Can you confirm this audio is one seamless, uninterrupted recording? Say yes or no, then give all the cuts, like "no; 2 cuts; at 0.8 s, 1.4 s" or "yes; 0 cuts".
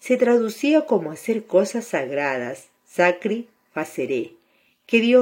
no; 1 cut; at 2.8 s